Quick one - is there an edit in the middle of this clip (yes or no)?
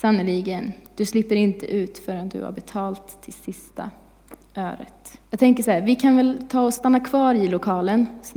yes